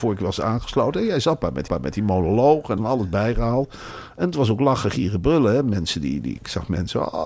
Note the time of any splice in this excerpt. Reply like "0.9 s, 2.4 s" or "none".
1.7 s, 2.8 s